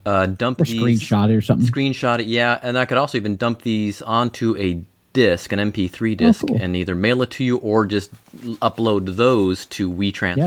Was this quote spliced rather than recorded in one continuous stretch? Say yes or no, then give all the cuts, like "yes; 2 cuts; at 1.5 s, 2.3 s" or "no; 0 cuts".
no; 0 cuts